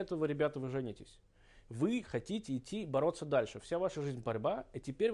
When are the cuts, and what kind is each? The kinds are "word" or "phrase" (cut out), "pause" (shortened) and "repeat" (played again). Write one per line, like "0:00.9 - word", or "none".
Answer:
none

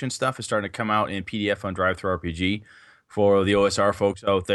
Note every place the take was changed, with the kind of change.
none

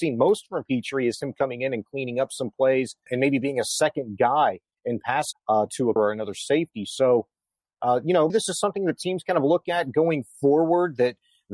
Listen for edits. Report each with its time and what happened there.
0:03.1 - word
0:05.3 - word
0:06.0 - word
0:08.3 - word

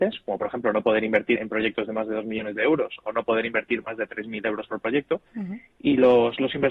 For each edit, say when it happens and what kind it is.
0:01.4 - word
0:05.3 - pause

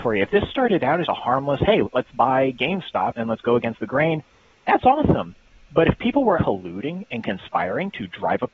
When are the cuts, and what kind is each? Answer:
0:01.0 - word
0:01.8 - word
0:03.1 - word
0:06.3 - word

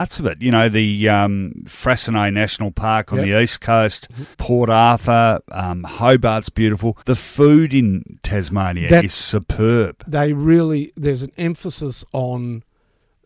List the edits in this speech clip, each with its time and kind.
0:04.3 - pause
0:07.0 - pause

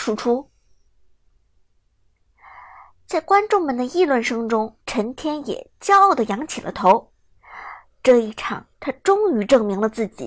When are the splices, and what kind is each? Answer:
0:04.8 - pause
0:08.7 - pause

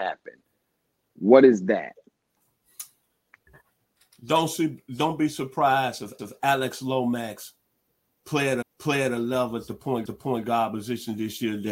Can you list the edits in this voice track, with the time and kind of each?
0:06.2 - repeat
0:08.6 - repeat
0:10.1 - repeat

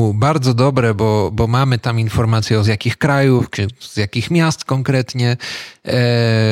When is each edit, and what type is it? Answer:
0:02.6 - word
0:03.8 - word

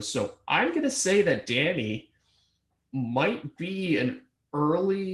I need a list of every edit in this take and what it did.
none

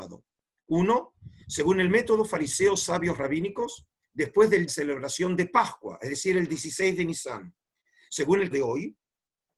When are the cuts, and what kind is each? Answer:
0:04.7 - phrase
0:08.5 - word

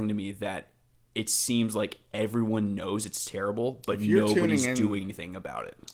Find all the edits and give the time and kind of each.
none

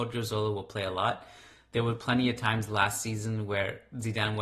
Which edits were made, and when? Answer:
none

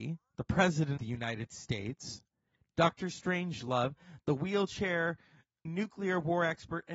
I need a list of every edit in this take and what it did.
0:01.0 - word
0:05.7 - word

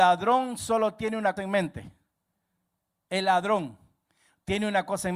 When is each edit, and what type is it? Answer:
0:01.4 - word

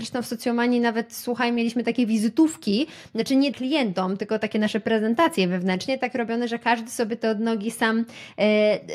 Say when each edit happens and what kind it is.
0:03.5 - word

